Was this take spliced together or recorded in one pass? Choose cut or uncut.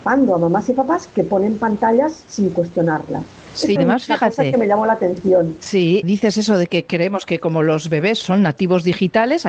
cut